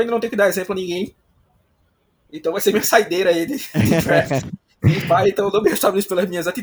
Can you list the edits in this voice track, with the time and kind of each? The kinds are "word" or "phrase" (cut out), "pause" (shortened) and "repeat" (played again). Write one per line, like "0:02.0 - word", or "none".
0:05.0 - word